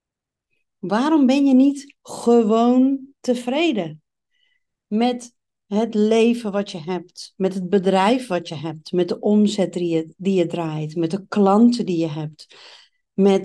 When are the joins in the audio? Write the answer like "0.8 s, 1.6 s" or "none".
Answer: 2.0 s